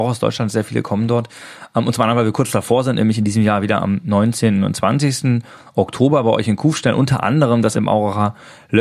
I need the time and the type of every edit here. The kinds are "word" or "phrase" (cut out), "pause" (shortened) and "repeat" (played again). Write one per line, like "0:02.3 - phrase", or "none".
0:07.7 - word